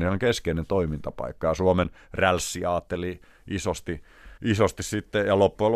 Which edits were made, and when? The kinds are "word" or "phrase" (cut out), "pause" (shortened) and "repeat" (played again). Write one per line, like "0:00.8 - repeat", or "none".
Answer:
0:04.4 - pause